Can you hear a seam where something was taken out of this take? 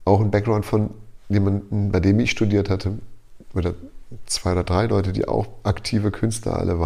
no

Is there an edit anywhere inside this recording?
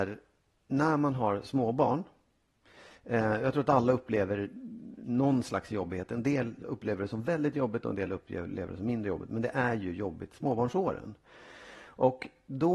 no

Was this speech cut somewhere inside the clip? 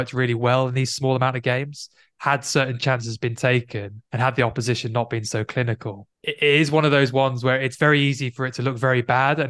yes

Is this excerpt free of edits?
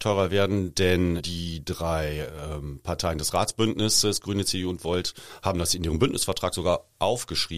no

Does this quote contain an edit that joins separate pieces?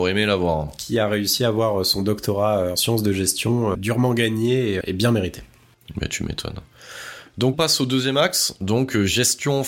yes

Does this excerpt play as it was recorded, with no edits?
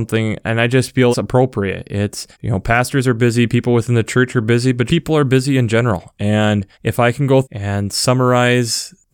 no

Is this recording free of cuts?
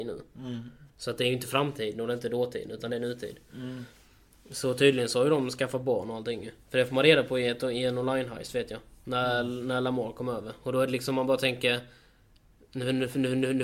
yes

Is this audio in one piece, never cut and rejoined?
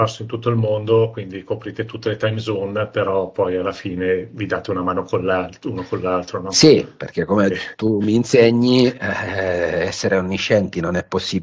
yes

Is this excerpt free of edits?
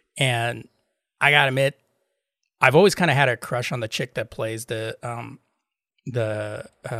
yes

